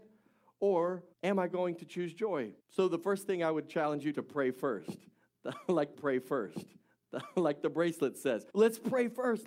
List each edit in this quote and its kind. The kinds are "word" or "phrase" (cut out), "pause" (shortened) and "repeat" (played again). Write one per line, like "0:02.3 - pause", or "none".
0:01.1 - pause
0:02.6 - pause
0:04.1 - phrase
0:05.9 - repeat
0:08.5 - pause